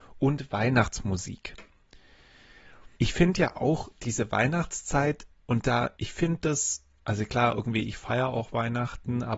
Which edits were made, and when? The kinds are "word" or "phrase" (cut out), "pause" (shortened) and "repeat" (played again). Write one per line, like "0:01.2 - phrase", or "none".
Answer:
0:02.9 - pause
0:06.0 - pause